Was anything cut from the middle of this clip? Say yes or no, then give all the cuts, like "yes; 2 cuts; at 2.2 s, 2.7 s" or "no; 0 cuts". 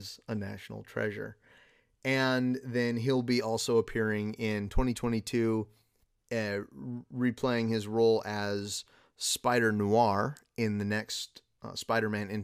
no; 0 cuts